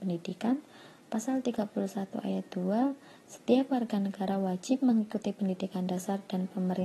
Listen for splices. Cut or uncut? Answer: uncut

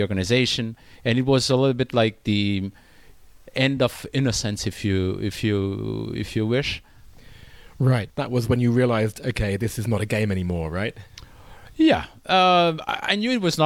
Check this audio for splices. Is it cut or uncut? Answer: uncut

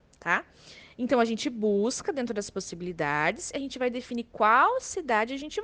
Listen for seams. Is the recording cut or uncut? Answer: uncut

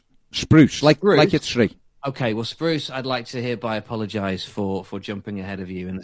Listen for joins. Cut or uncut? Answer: cut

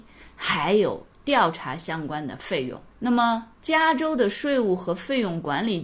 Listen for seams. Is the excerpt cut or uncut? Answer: cut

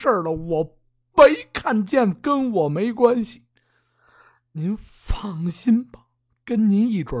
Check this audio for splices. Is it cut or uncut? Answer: uncut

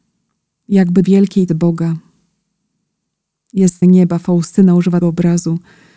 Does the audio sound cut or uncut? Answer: cut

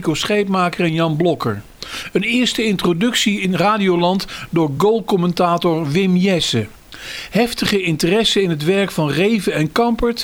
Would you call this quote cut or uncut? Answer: uncut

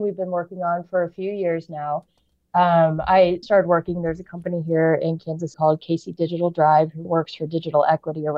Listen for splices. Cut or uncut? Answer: cut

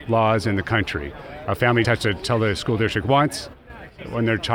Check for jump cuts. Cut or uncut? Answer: cut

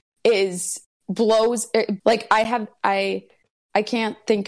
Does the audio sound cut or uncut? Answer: cut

